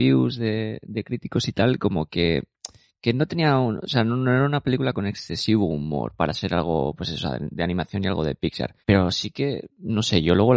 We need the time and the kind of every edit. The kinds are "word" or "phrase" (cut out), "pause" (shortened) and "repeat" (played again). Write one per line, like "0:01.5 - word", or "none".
0:08.8 - pause